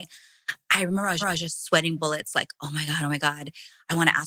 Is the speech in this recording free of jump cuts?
no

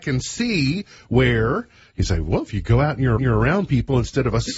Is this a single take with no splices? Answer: no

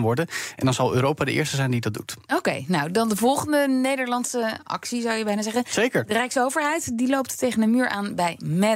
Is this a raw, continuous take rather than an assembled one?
yes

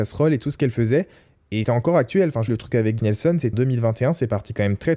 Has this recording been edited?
yes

